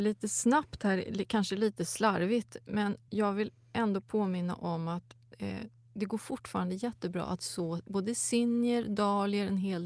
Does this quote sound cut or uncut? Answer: uncut